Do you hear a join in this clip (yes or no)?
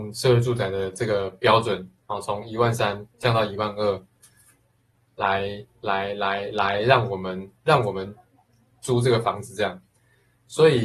yes